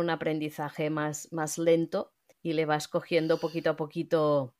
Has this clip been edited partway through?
yes; 1 cut; at 2.3 s

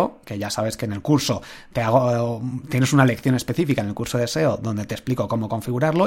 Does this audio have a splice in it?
no; 0 cuts

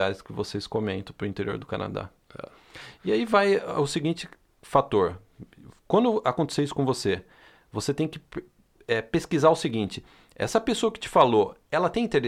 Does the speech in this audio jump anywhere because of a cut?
no; 0 cuts

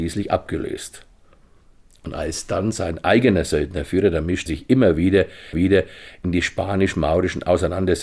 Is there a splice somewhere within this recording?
yes; 2 cuts; at 4.5 s, 5.5 s

